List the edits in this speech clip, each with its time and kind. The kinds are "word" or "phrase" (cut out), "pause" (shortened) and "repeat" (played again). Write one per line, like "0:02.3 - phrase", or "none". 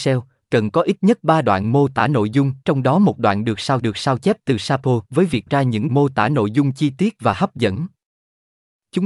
0:02.6 - pause
0:03.8 - repeat
0:05.0 - pause
0:05.5 - word
0:05.9 - word